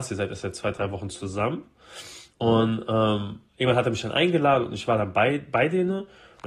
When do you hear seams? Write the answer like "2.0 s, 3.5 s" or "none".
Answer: 2.3 s, 3.5 s